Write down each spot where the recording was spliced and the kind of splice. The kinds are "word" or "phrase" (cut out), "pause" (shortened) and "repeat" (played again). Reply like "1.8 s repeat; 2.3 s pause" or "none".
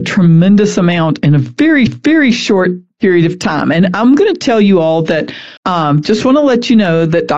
1.9 s repeat; 5.6 s pause